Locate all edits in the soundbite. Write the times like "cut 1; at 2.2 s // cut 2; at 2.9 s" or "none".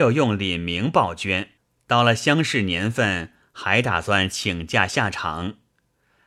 cut 1; at 1.6 s